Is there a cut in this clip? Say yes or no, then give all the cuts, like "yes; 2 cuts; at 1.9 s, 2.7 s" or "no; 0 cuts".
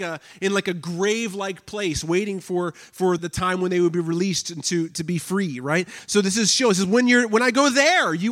yes; 2 cuts; at 3.2 s, 4.9 s